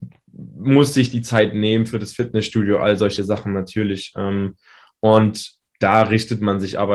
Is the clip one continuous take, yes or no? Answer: yes